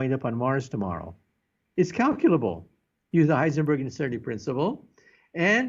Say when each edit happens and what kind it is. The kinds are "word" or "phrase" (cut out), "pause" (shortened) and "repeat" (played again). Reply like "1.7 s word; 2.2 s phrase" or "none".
none